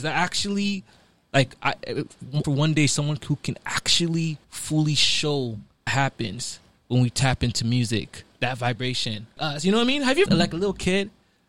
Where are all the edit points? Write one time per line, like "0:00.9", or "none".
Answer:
0:02.4
0:04.4
0:05.9
0:09.4
0:10.3